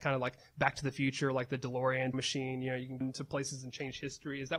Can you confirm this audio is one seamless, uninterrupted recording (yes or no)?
no